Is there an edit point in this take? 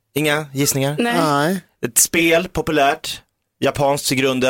no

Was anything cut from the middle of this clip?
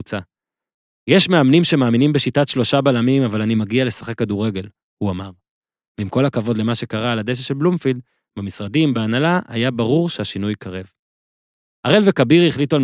no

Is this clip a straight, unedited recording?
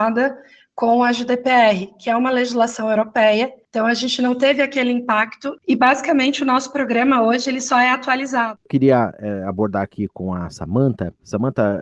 yes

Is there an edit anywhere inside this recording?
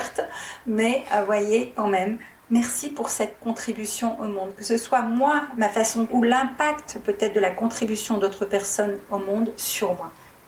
yes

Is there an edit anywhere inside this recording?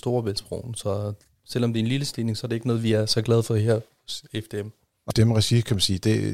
yes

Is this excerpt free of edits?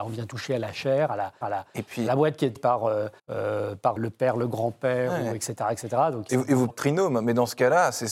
no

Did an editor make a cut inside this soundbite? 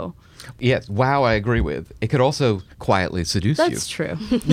yes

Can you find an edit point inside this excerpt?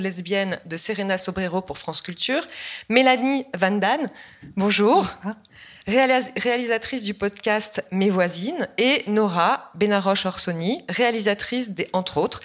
no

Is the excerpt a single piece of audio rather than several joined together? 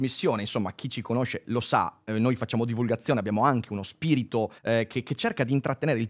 no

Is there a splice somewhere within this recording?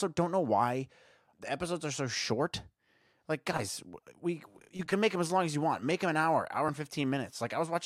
no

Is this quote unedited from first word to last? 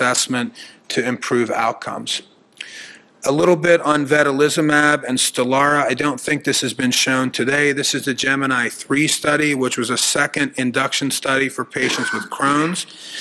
yes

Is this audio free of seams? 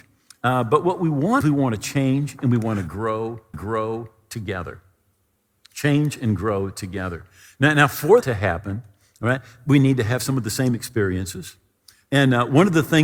no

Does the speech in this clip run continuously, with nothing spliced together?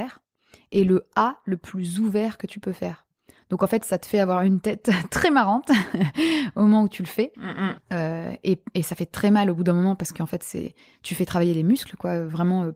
yes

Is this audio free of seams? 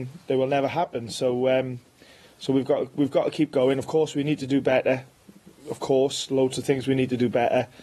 yes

